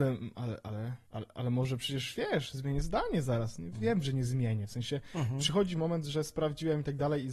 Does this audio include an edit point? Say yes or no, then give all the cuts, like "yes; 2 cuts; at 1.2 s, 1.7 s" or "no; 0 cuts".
yes; 1 cut; at 1.1 s